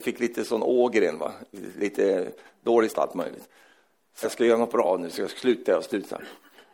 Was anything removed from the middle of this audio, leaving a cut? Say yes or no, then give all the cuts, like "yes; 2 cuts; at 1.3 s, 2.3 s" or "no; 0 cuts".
yes; 2 cuts; at 2.9 s, 4.2 s